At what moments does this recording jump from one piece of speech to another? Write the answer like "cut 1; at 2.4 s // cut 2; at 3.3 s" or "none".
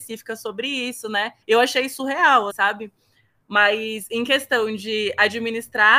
cut 1; at 1.4 s // cut 2; at 2.5 s